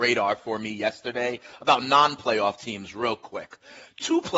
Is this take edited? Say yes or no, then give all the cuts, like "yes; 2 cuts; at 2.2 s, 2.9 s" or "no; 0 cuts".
no; 0 cuts